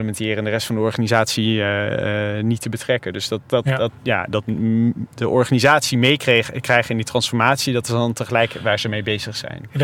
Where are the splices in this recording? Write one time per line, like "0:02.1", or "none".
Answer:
0:03.4